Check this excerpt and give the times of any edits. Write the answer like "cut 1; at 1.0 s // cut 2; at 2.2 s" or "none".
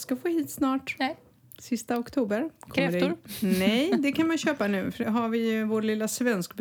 cut 1; at 5.0 s